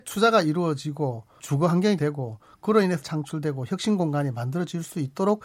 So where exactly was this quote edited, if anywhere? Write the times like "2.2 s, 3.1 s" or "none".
1.4 s, 2.0 s, 3.0 s